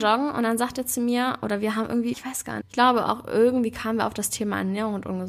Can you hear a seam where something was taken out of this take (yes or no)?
yes